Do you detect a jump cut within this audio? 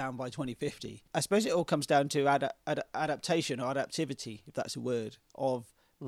yes; 1 cut; at 1.1 s

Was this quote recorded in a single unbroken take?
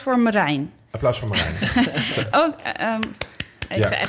no; 1 cut; at 2.3 s

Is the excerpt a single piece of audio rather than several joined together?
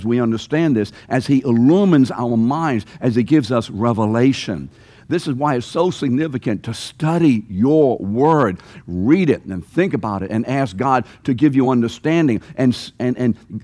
yes; 0 cuts

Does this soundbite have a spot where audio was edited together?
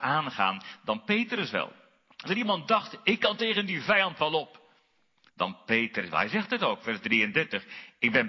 yes; 1 cut; at 2.3 s

